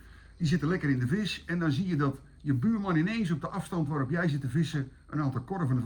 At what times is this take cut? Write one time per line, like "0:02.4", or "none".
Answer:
none